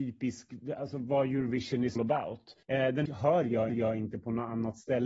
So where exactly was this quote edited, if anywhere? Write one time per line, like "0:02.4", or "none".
0:02.0
0:02.6
0:03.1
0:03.7